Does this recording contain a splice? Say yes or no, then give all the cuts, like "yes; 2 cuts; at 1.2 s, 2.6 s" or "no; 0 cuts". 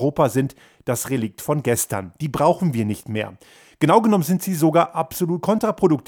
no; 0 cuts